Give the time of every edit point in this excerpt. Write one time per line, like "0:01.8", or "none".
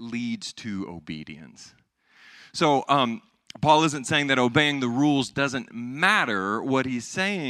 none